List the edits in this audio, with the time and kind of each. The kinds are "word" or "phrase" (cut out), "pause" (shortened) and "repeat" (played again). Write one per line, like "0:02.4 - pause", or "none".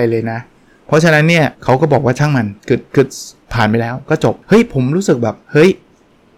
0:01.5 - pause
0:02.6 - pause
0:04.4 - pause
0:05.4 - pause